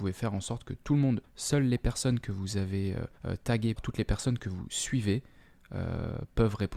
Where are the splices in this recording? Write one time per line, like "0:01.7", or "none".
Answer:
0:01.2
0:03.2
0:03.8